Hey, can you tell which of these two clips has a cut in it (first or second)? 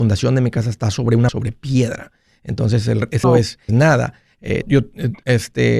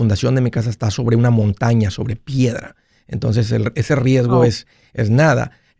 first